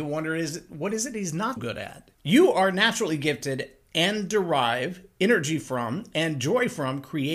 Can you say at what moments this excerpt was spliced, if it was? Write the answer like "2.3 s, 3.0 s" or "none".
1.6 s, 2.2 s